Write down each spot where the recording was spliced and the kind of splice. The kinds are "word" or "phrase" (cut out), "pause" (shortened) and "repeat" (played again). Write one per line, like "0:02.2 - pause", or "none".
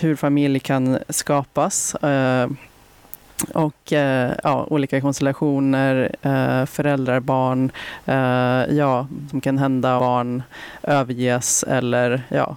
0:09.3 - word
0:10.0 - word